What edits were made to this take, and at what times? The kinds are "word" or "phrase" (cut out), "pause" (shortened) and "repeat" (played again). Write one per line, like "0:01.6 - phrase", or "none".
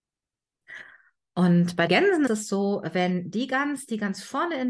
0:01.9 - word
0:02.3 - word